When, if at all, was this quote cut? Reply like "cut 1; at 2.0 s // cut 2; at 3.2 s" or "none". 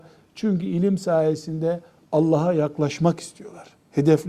none